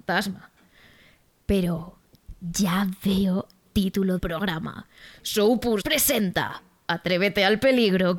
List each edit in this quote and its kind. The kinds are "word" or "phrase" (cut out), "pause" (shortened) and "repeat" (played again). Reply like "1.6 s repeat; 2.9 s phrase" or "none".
3.7 s word; 4.2 s word; 5.8 s word